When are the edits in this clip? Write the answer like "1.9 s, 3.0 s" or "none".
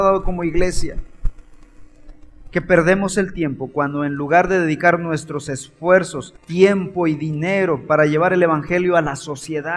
6.4 s